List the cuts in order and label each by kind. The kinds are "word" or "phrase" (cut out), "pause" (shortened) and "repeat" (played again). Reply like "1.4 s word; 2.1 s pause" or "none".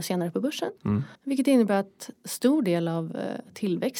1.2 s pause